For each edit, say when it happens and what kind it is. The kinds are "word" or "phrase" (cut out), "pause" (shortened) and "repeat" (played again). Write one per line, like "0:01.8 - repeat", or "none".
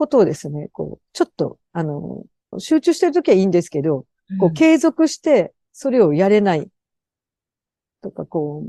0:02.5 - phrase
0:05.6 - pause